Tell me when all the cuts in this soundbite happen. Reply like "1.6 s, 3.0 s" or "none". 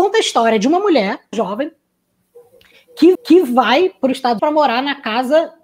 1.3 s, 3.1 s, 4.4 s